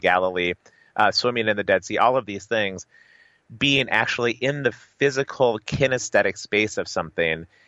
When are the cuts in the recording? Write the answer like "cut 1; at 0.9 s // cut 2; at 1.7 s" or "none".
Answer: none